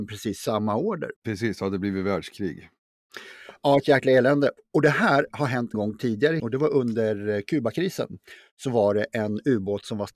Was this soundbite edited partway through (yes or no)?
yes